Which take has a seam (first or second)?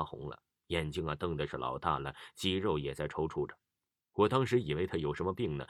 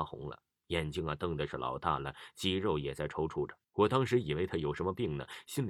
second